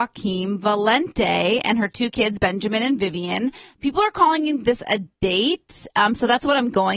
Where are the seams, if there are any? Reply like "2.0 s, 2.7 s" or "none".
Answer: none